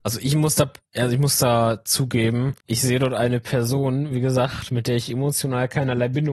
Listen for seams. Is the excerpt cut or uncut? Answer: cut